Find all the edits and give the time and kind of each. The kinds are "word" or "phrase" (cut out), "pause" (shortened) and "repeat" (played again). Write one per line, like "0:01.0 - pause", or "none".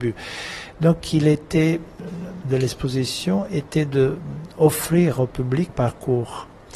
0:02.4 - word
0:05.7 - word